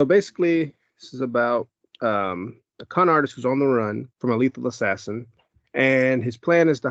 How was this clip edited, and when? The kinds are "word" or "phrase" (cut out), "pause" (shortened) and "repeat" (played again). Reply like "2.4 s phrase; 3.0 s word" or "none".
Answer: 4.1 s pause